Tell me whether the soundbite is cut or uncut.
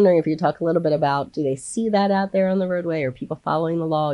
uncut